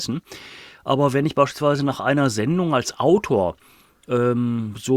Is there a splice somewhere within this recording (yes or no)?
no